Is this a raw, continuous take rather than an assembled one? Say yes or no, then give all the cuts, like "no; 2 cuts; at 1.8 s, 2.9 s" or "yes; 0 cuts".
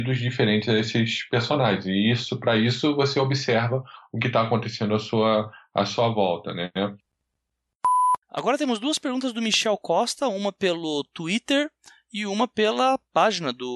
no; 1 cut; at 8.2 s